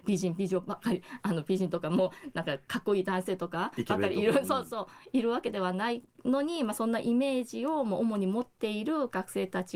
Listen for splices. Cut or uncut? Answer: uncut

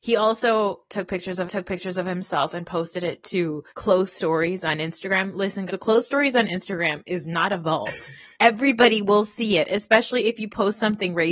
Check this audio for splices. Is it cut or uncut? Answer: cut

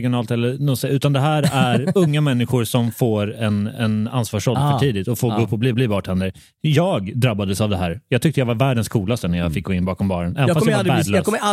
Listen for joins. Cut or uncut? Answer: cut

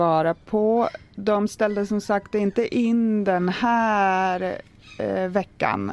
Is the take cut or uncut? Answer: uncut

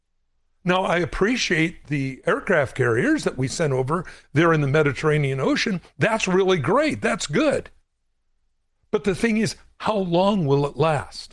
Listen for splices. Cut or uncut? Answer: uncut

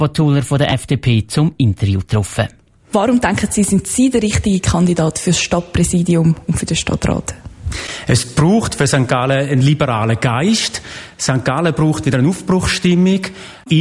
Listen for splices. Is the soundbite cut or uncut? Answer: uncut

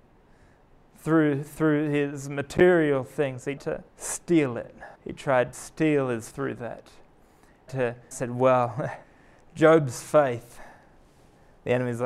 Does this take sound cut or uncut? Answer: cut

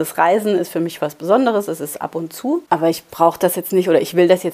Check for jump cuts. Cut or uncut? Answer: uncut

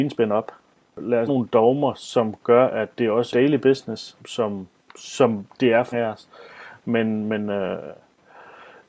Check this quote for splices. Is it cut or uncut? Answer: cut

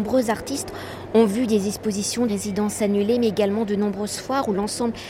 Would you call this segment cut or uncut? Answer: cut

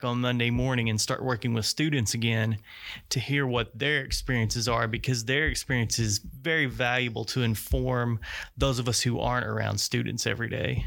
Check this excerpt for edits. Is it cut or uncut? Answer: uncut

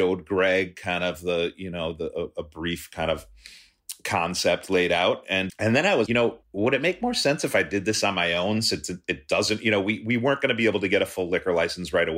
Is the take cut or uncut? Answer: cut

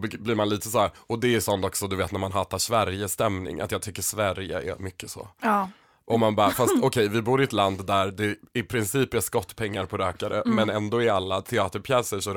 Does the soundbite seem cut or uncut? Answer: cut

